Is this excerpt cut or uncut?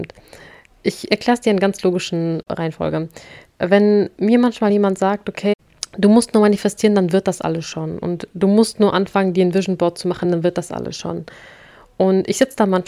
uncut